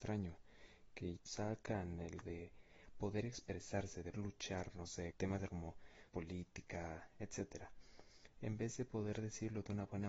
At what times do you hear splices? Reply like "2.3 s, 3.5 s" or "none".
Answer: 1.2 s, 2.2 s, 4.1 s, 5.1 s, 5.5 s, 6.1 s